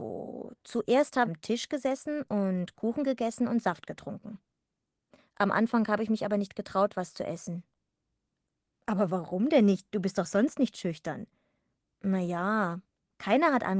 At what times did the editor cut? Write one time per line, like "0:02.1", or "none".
0:01.3